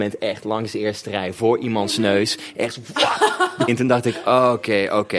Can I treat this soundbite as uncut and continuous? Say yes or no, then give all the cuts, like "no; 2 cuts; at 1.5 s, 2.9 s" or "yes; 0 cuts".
no; 1 cut; at 3.7 s